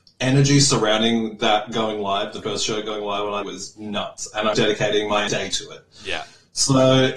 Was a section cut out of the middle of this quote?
yes; 4 cuts; at 2.4 s, 3.4 s, 4.5 s, 5.3 s

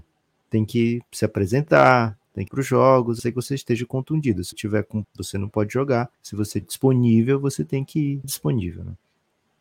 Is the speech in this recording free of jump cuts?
no; 7 cuts; at 2.5 s, 3.2 s, 4.5 s, 5.0 s, 6.1 s, 6.6 s, 8.2 s

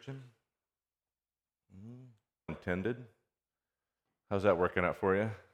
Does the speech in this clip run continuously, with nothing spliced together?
no; 1 cut; at 2.5 s

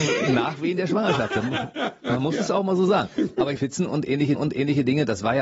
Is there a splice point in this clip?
yes; 2 cuts; at 3.6 s, 4.4 s

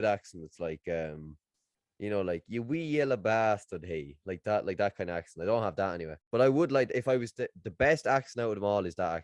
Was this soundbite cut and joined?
yes; 2 cuts; at 1.7 s, 6.2 s

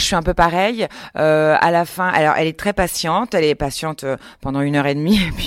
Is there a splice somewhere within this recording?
no; 0 cuts

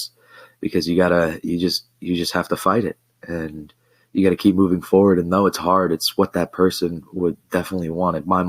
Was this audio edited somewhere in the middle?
no; 0 cuts

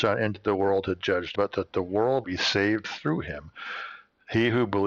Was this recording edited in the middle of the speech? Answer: yes; 2 cuts; at 1.3 s, 2.2 s

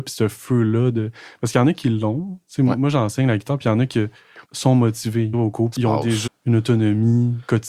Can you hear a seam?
yes; 4 cuts; at 4.4 s, 5.3 s, 5.7 s, 6.3 s

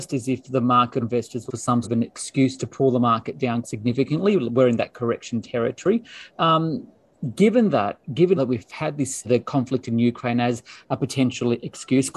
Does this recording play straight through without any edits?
no; 6 cuts; at 1.0 s, 1.5 s, 1.8 s, 3.6 s, 8.4 s, 9.2 s

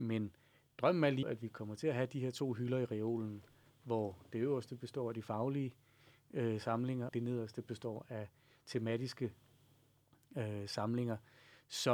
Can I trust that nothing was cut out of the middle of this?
no; 2 cuts; at 1.2 s, 7.1 s

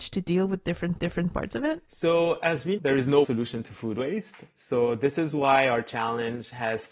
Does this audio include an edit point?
yes; 4 cuts; at 1.0 s, 1.9 s, 2.8 s, 3.2 s

